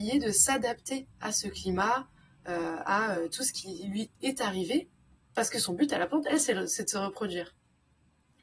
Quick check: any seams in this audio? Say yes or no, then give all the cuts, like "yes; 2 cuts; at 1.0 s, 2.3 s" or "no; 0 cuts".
no; 0 cuts